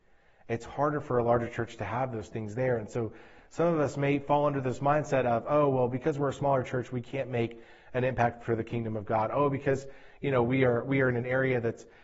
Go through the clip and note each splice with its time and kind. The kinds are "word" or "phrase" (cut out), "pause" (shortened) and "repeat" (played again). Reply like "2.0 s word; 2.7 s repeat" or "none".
none